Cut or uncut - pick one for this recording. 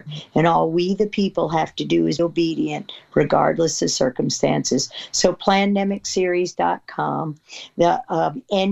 cut